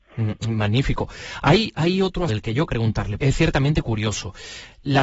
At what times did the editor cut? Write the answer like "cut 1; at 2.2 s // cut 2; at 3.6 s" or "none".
cut 1; at 2.3 s // cut 2; at 2.7 s // cut 3; at 3.2 s